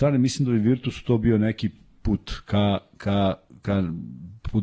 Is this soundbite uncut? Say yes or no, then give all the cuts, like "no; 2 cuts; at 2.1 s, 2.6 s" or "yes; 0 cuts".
yes; 0 cuts